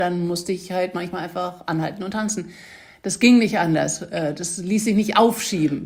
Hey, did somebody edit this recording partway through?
no; 0 cuts

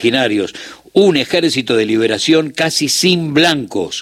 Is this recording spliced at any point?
no; 0 cuts

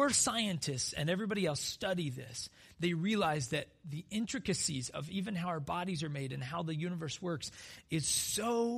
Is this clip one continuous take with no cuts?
yes; 0 cuts

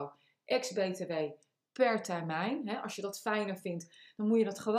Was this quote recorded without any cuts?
yes; 0 cuts

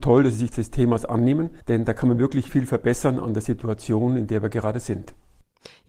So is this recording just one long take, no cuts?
no; 2 cuts; at 1.6 s, 2.5 s

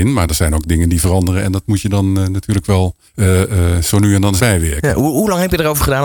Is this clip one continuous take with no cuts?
no; 2 cuts; at 3.1 s, 4.4 s

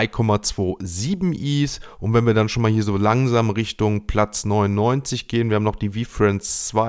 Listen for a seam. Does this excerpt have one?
no; 0 cuts

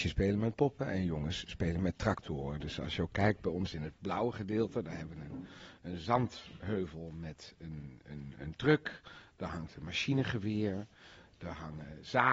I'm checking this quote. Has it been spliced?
no; 0 cuts

